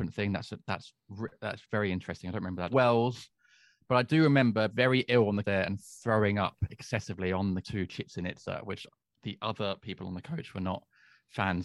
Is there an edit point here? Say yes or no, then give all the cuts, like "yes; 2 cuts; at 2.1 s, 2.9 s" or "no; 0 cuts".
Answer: yes; 5 cuts; at 2.7 s, 4.7 s, 5.4 s, 7.6 s, 8.9 s